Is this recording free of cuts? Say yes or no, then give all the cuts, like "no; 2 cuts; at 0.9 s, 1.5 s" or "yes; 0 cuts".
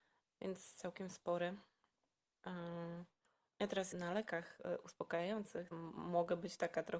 no; 2 cuts; at 3.9 s, 5.7 s